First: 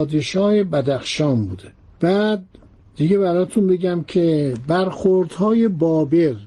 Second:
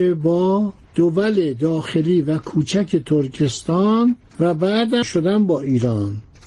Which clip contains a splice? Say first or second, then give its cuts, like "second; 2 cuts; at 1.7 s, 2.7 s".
second; 1 cut; at 5.0 s